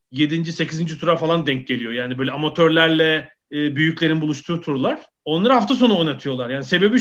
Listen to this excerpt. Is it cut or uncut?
cut